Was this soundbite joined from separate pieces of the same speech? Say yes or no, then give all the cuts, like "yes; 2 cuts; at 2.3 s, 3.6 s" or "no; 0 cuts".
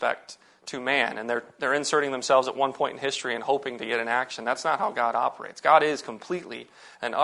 no; 0 cuts